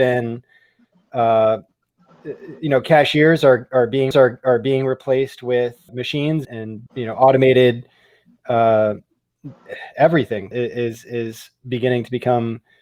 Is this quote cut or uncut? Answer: cut